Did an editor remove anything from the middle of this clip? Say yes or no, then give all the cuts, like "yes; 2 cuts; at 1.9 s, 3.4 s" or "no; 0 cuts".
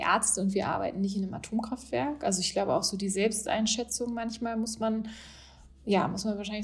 no; 0 cuts